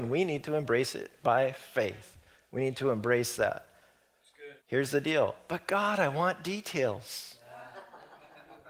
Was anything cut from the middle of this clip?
yes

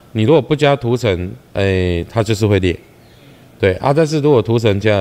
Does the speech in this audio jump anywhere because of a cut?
no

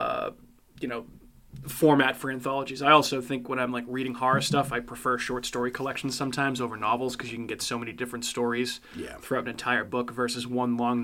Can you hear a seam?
no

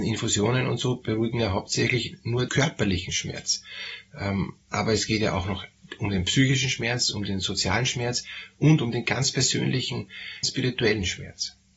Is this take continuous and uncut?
no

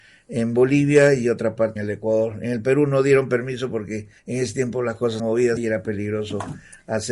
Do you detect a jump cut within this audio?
yes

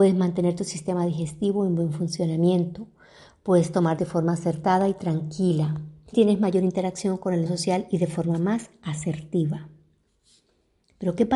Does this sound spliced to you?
yes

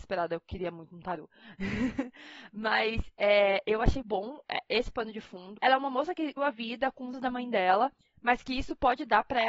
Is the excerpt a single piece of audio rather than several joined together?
no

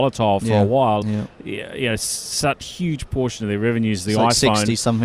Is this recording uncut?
no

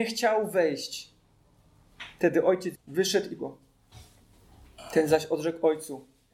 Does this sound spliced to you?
yes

